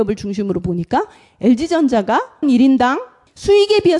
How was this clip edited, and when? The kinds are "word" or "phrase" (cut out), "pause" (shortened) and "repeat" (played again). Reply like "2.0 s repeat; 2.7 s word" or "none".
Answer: 2.4 s word

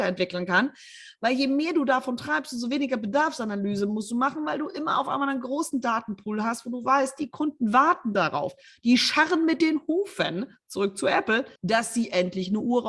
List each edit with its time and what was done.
11.6 s pause

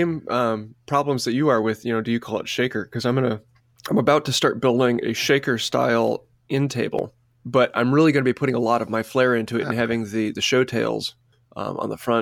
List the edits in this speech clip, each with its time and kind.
5.0 s word

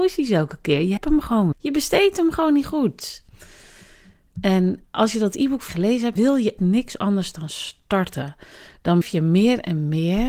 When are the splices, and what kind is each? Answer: 1.0 s word; 1.5 s word; 4.8 s word; 5.7 s word; 6.2 s word; 6.6 s word; 9.0 s word

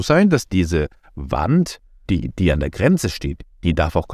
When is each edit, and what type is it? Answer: 2.1 s word

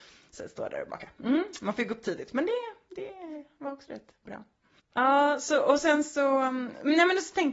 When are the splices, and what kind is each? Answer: none

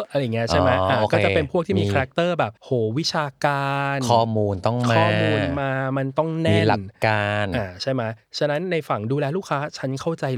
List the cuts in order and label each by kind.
2.6 s pause

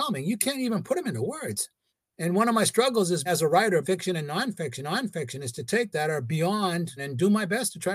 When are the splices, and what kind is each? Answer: 1.9 s pause; 3.3 s word; 3.8 s phrase; 4.8 s repeat; 5.9 s phrase; 7.0 s word

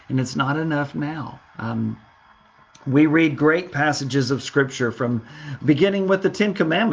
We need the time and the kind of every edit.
1.5 s pause

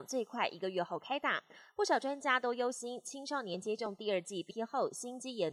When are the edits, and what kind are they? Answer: 4.5 s word

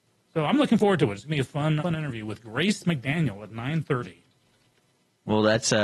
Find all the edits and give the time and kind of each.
1.8 s word

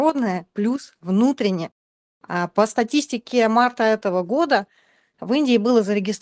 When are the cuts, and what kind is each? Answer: none

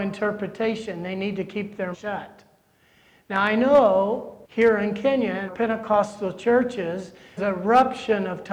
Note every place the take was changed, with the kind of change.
1.9 s word; 4.4 s pause; 5.5 s word; 7.4 s word

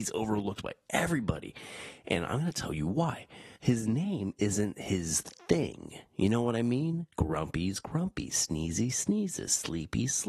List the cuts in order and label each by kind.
3.6 s pause; 7.1 s pause

